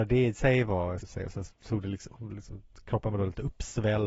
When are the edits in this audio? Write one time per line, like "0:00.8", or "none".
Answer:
0:01.0
0:01.5